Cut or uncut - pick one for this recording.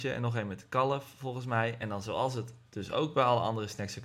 uncut